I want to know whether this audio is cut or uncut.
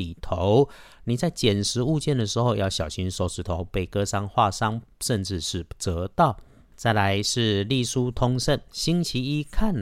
cut